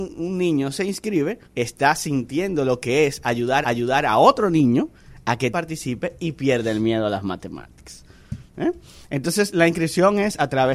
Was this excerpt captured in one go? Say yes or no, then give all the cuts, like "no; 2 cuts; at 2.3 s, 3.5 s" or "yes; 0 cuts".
no; 3 cuts; at 1.4 s, 3.6 s, 5.5 s